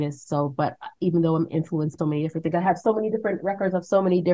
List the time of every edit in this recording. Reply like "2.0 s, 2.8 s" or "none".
2.0 s